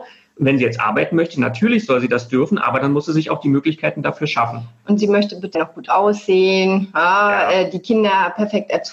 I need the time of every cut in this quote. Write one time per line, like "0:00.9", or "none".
0:05.5